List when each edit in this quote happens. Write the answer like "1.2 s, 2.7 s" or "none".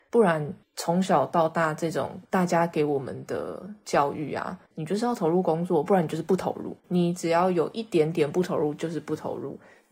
2.2 s, 4.7 s, 6.8 s